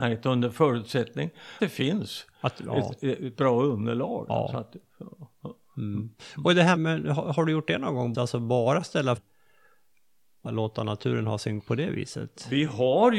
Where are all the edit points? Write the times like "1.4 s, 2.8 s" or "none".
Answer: 1.6 s, 6.8 s, 8.1 s, 9.2 s, 10.5 s, 11.6 s